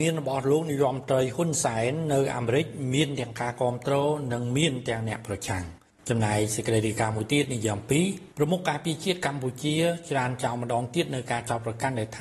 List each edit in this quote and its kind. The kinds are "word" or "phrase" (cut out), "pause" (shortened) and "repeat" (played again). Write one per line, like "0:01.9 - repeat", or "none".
0:05.9 - pause
0:08.3 - pause